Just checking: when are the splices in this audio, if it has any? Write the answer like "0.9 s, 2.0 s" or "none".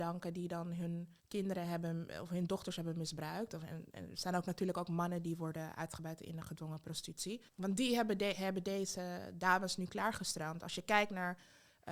1.2 s, 7.5 s